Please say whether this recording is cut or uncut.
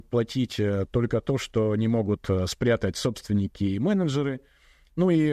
uncut